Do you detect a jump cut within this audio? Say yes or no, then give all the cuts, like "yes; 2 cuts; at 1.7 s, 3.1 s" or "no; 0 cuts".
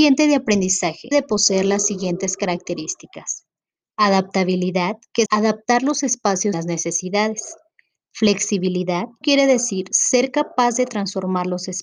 yes; 4 cuts; at 1.1 s, 5.3 s, 6.5 s, 9.2 s